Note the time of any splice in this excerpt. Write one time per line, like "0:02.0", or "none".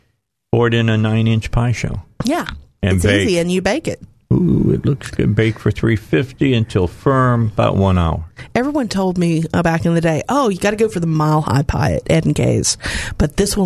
none